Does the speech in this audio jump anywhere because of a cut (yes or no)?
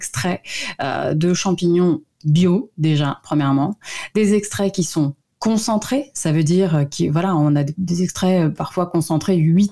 no